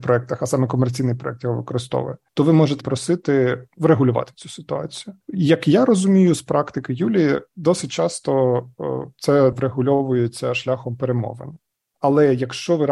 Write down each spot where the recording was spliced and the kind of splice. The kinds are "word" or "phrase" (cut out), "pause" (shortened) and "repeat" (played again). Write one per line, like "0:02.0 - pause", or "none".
0:02.3 - pause
0:02.8 - phrase
0:05.2 - pause
0:09.5 - phrase